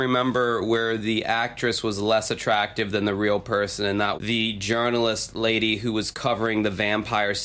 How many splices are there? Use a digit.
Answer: 1